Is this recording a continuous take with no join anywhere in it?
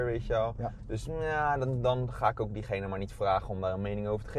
yes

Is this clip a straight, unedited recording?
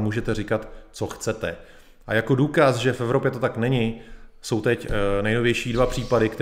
yes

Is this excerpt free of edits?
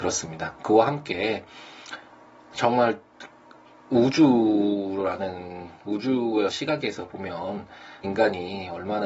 no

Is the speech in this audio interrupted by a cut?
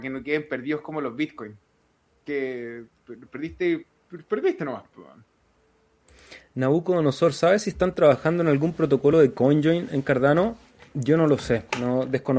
no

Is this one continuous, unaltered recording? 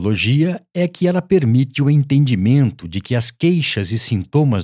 yes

